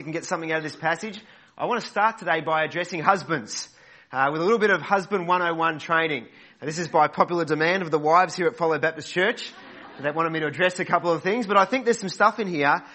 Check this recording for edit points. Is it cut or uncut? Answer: uncut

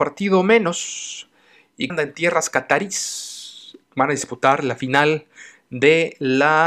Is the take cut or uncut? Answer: cut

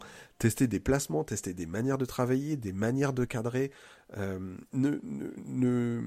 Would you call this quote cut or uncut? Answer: uncut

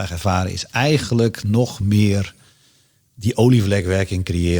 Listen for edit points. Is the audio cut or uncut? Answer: uncut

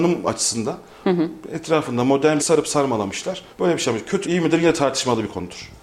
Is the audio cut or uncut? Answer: cut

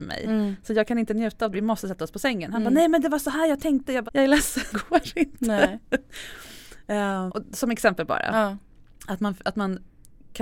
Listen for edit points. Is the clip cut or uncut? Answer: cut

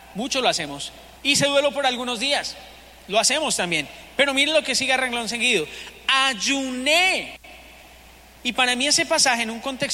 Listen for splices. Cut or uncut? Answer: cut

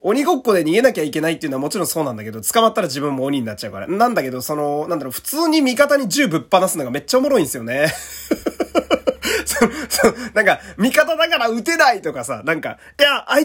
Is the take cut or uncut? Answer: uncut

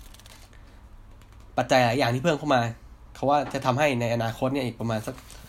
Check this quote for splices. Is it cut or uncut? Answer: cut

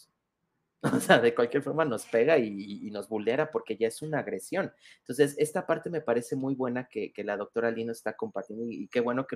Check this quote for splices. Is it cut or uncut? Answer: uncut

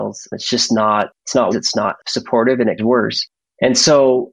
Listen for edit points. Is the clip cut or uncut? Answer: cut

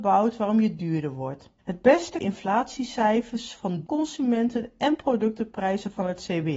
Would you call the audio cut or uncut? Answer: cut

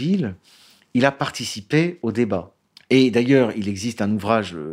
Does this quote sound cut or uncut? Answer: uncut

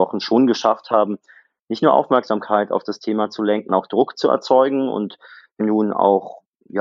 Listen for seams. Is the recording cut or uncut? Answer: cut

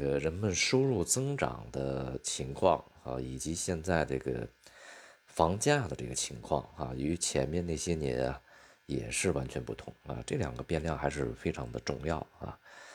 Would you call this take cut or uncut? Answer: uncut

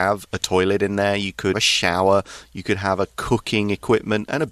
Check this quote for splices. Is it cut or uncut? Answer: cut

